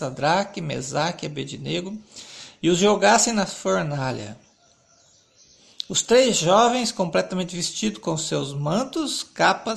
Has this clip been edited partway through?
no; 0 cuts

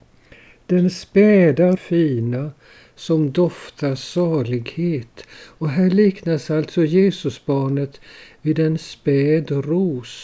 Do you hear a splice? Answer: yes; 1 cut; at 1.8 s

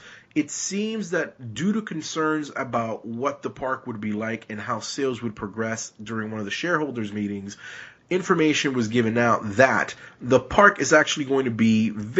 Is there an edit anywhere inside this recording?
no; 0 cuts

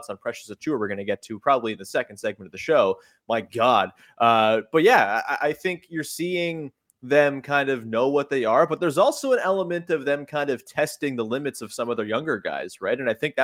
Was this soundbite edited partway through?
no; 0 cuts

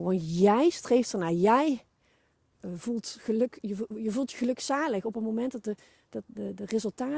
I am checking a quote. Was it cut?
no; 0 cuts

